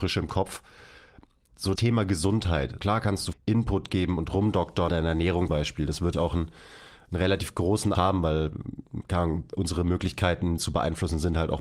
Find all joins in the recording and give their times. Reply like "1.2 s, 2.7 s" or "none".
1.8 s, 2.8 s, 3.3 s, 4.9 s, 5.5 s, 6.1 s, 7.9 s, 10.6 s